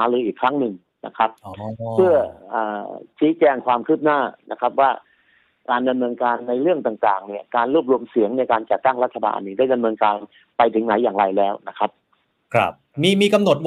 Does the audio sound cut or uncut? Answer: uncut